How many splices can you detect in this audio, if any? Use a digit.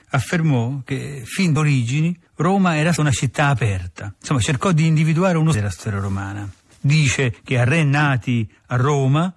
3